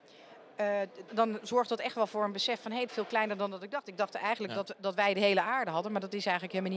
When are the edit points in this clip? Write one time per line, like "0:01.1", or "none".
0:01.1
0:02.9